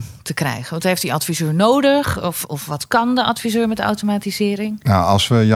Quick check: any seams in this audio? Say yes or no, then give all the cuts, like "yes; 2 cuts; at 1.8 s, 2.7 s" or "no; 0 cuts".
no; 0 cuts